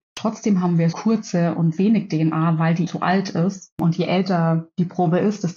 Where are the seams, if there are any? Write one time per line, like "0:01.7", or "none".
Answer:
0:00.9
0:02.9